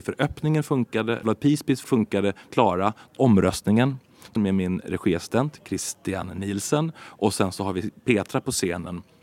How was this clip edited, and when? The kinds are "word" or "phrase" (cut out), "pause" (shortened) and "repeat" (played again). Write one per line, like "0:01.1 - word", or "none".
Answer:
0:01.2 - word
0:01.8 - phrase
0:02.5 - phrase
0:03.2 - word
0:04.4 - phrase